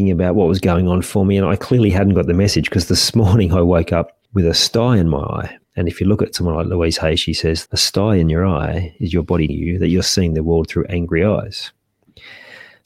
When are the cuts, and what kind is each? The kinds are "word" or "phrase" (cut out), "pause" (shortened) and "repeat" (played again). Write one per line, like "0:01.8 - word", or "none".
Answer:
0:04.2 - pause
0:05.6 - pause
0:07.7 - word
0:09.5 - word

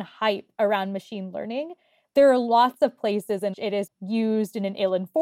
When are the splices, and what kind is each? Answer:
0:03.5 - word
0:03.9 - word

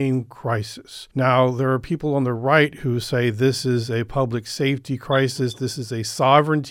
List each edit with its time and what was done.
0:01.1 - pause

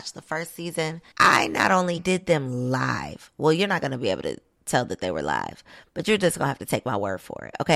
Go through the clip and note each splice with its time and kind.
0:01.1 - pause
0:02.0 - phrase

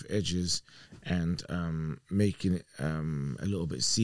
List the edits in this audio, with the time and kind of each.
none

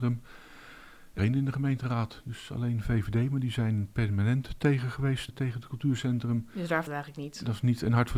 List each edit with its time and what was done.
0:01.2 - phrase
0:05.3 - word
0:06.9 - word

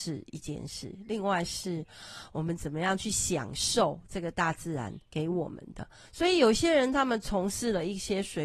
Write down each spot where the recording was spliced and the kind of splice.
0:05.0 - pause

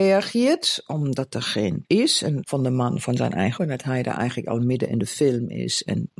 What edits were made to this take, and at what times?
0:01.8 - word
0:02.4 - phrase
0:03.6 - word

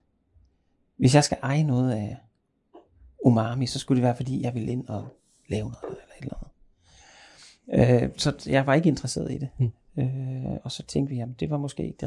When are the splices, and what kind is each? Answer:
none

